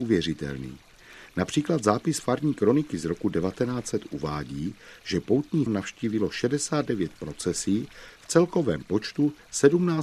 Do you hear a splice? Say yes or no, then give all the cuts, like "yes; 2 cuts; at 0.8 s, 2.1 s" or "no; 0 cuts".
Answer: yes; 1 cut; at 5.7 s